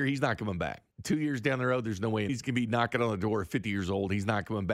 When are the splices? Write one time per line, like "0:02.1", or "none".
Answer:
0:00.9
0:02.3